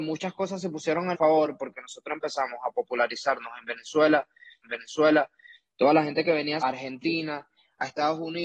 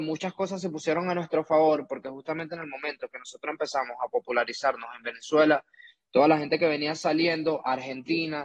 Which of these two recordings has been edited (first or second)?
first